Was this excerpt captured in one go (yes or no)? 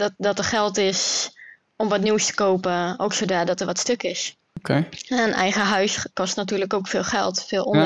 yes